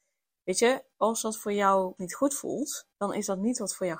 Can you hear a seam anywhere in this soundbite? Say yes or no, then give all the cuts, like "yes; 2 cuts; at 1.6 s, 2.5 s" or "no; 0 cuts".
yes; 3 cuts; at 0.9 s, 2.0 s, 2.9 s